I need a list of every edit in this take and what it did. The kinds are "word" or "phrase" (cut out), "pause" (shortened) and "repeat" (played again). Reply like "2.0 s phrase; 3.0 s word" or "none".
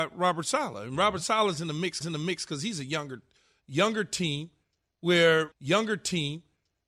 2.0 s repeat; 5.5 s repeat